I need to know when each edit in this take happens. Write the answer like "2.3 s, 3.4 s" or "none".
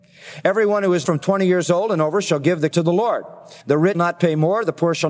1.0 s, 2.7 s, 3.6 s, 3.9 s

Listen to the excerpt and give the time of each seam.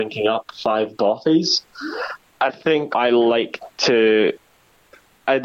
2.5 s, 2.9 s

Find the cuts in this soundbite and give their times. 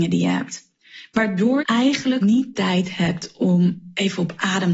1.6 s, 2.2 s, 2.5 s

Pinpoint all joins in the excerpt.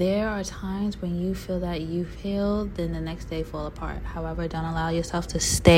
none

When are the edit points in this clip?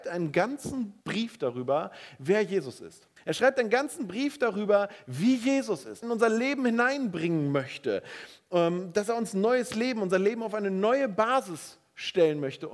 1.0 s, 3.2 s, 6.0 s

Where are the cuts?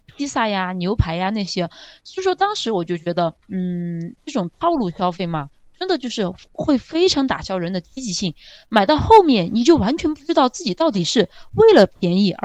3.4 s

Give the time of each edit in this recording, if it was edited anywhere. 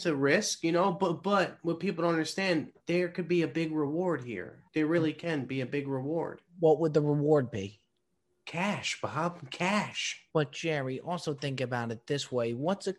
2.8 s, 4.7 s, 10.3 s

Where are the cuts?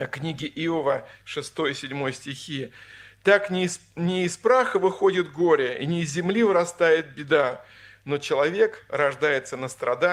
none

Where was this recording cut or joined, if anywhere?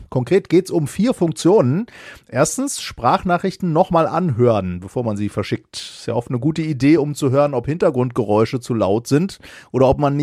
none

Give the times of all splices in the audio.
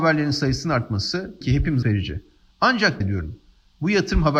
1.4 s, 1.8 s, 3.0 s

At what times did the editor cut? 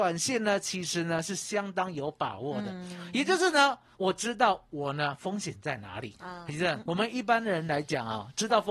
6.9 s

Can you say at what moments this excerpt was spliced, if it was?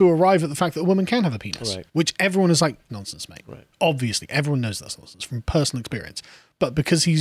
1.9 s, 2.9 s, 3.7 s

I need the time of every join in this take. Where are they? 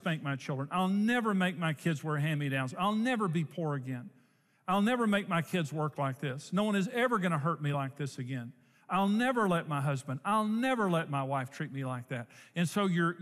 none

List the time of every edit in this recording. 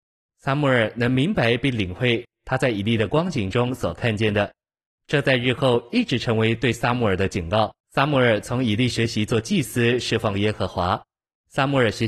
7.8 s

